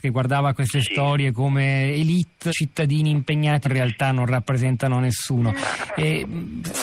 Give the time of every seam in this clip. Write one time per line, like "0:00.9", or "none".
0:02.5
0:03.6